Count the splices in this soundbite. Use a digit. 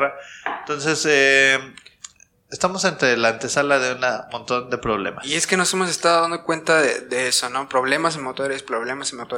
0